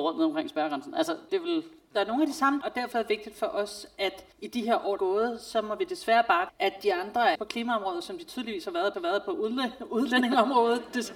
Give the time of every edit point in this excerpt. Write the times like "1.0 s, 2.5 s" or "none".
1.3 s, 2.6 s, 2.9 s, 4.3 s, 5.0 s, 6.5 s, 7.4 s, 8.9 s